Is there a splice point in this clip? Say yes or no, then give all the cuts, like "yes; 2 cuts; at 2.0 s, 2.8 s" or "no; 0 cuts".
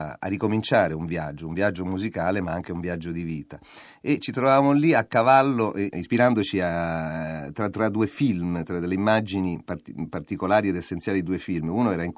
no; 0 cuts